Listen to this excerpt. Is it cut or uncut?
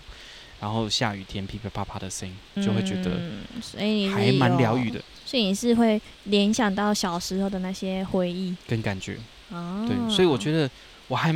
cut